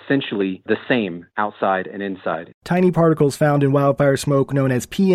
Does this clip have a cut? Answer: yes; 1 cut; at 2.6 s

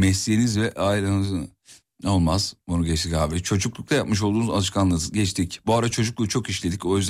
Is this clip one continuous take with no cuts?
yes; 0 cuts

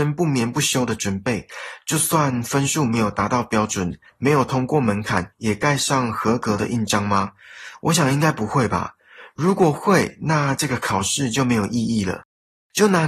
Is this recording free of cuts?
no; 1 cut; at 5.3 s

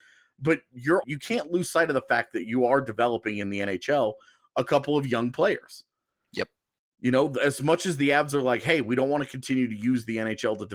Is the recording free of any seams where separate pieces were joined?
no; 1 cut; at 1.0 s

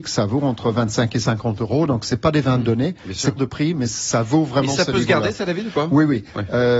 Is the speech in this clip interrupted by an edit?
yes; 1 cut; at 3.4 s

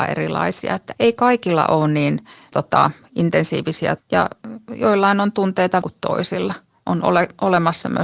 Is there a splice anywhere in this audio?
yes; 5 cuts; at 0.9 s, 2.5 s, 4.0 s, 4.7 s, 5.8 s

